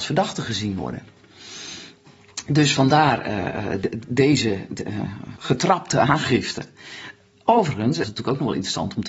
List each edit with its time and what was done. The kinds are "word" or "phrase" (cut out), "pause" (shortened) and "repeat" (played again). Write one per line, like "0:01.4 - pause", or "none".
0:05.4 - word
0:08.0 - word